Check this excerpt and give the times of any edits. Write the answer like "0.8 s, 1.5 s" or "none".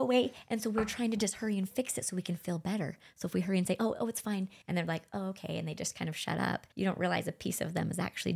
4.6 s, 6.7 s